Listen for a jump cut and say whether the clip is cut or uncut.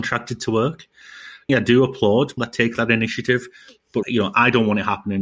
cut